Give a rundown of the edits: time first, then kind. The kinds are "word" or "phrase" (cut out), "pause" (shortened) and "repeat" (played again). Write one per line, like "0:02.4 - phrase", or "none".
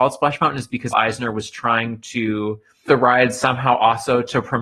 0:00.9 - word
0:02.9 - word